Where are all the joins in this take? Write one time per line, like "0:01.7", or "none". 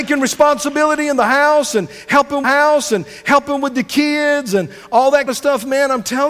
0:02.4
0:05.3

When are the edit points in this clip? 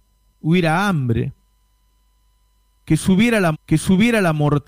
0:03.5

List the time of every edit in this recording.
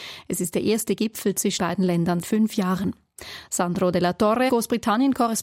0:01.6
0:02.2
0:04.5

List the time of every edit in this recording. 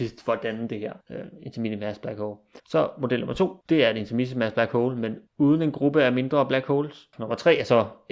0:01.0
0:02.6
0:03.6
0:05.3
0:07.1

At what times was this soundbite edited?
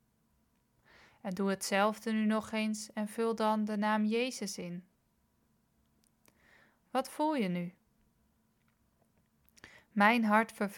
none

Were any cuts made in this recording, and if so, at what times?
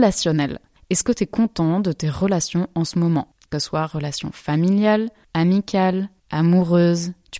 0:03.5

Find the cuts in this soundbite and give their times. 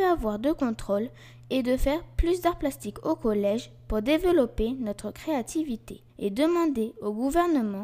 0:06.1

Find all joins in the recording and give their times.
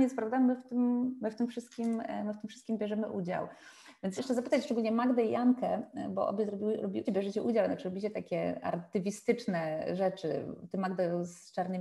0:04.2
0:07.1

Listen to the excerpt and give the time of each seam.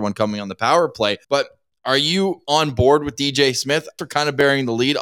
0:01.2
0:04.0

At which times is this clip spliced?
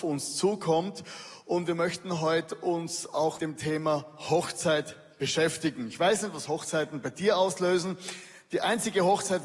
0:03.4

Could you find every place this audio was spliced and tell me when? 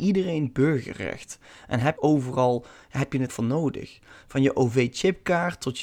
0:02.0
0:03.3

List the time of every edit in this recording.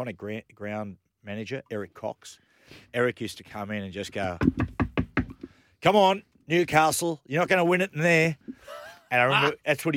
none

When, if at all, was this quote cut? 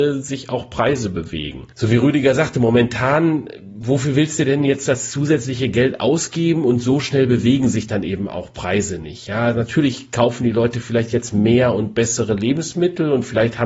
0:01.7

